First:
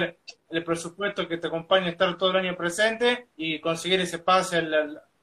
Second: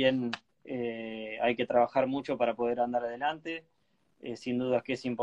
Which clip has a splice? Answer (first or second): first